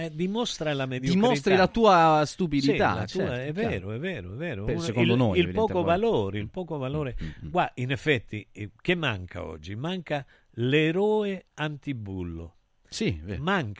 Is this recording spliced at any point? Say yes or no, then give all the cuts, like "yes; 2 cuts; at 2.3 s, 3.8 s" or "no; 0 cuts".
no; 0 cuts